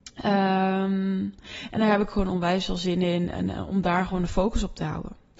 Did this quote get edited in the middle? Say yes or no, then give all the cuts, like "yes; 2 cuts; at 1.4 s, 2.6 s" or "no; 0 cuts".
no; 0 cuts